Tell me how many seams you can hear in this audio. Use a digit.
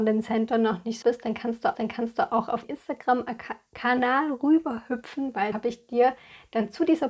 4